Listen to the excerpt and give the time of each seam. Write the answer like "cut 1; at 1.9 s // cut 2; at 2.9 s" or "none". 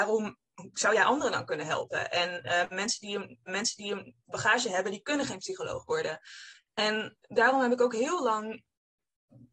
cut 1; at 3.5 s